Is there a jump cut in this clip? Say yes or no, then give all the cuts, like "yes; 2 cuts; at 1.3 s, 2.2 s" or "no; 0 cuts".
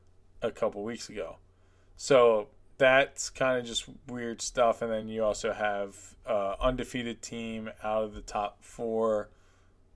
no; 0 cuts